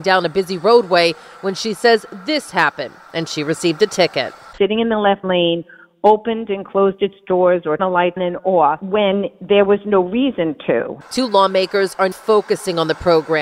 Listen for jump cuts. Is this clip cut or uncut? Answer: cut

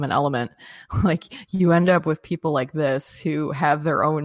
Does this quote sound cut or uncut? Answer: uncut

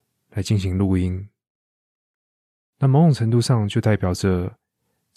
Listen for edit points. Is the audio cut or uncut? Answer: uncut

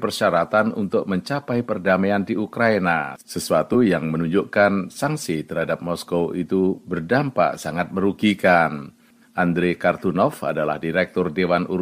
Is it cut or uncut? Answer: uncut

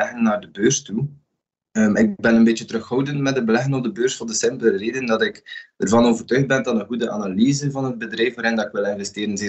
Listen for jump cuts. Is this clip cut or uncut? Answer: uncut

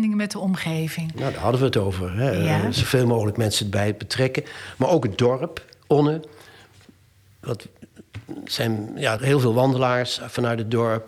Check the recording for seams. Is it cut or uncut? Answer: cut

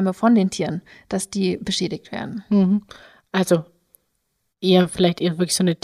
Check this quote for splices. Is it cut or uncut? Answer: uncut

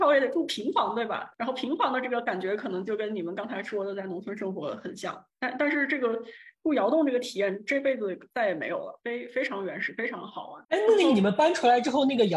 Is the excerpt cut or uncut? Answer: cut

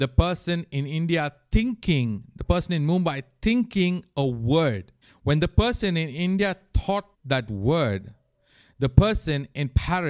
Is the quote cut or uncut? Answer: cut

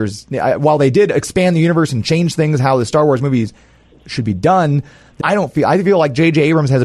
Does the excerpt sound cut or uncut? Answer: cut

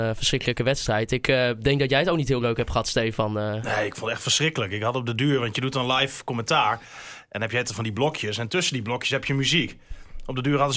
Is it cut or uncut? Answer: uncut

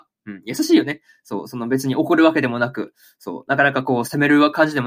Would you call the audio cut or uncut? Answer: uncut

